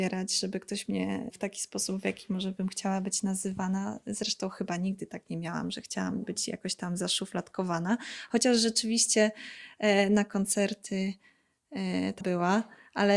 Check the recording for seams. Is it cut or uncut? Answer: cut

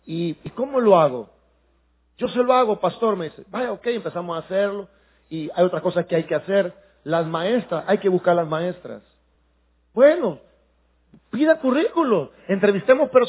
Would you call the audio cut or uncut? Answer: uncut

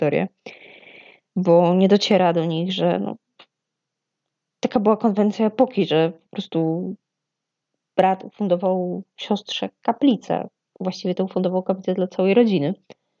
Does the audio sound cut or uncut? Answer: uncut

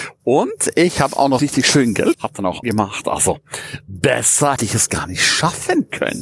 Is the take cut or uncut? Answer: cut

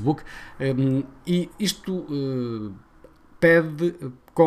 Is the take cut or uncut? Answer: uncut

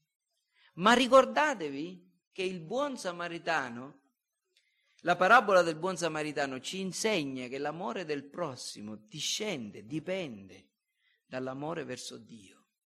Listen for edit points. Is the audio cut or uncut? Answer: uncut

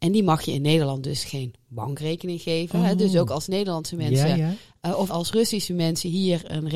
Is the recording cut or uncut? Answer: cut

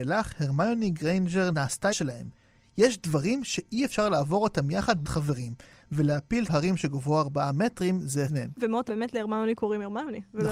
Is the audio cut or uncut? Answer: cut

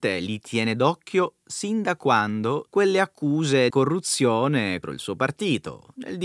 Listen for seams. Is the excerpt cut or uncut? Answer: cut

